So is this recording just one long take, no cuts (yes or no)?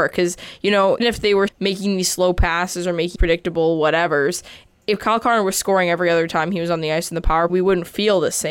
no